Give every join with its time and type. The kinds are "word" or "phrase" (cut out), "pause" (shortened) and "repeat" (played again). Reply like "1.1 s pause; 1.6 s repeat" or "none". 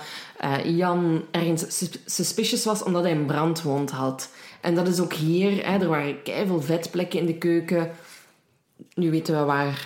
none